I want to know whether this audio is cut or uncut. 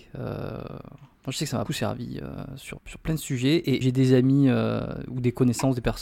cut